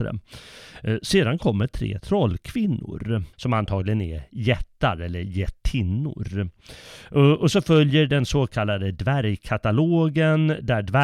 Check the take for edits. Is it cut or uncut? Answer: cut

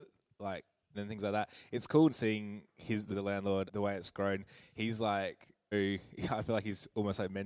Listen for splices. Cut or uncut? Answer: cut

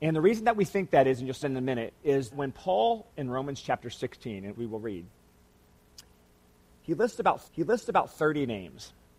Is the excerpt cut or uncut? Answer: cut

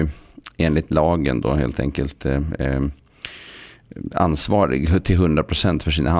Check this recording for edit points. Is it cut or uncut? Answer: uncut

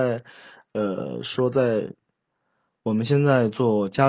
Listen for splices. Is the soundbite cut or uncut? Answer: uncut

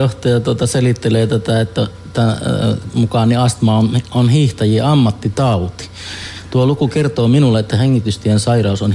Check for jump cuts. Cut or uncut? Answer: uncut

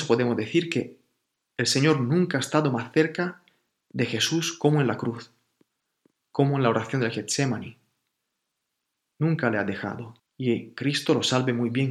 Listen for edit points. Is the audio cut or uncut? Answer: cut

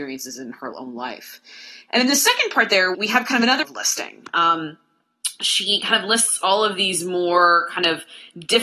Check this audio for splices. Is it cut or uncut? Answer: cut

